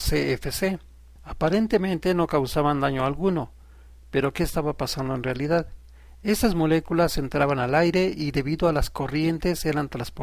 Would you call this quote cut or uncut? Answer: uncut